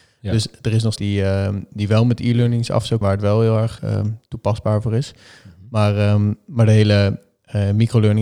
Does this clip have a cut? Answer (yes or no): yes